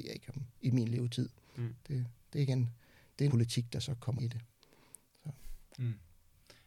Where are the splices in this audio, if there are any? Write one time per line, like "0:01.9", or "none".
0:03.3
0:04.2